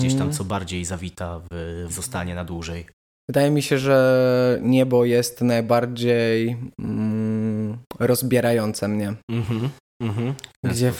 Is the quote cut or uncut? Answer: cut